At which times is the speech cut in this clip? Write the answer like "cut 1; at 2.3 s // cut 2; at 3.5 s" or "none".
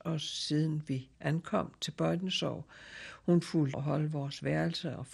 cut 1; at 1.1 s // cut 2; at 3.7 s